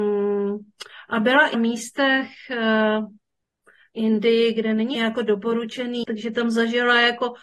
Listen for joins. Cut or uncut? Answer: cut